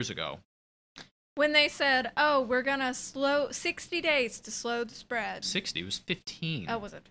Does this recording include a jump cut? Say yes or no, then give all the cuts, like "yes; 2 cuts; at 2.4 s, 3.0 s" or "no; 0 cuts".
no; 0 cuts